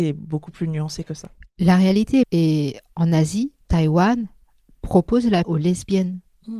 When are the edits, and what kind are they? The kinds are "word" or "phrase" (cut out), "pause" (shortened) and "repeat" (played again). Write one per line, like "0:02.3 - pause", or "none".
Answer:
0:02.2 - phrase
0:03.6 - pause
0:05.4 - word